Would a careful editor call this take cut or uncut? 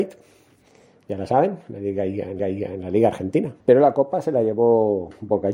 cut